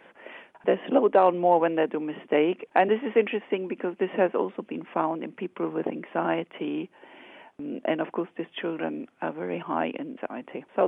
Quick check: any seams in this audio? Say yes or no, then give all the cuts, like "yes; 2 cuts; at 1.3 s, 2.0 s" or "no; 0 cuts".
no; 0 cuts